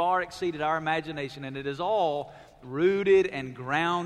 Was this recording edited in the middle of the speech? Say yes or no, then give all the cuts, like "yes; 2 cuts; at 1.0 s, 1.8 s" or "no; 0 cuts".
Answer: no; 0 cuts